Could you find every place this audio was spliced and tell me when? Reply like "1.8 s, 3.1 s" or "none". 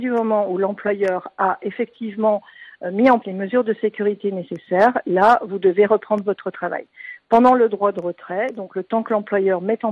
3.2 s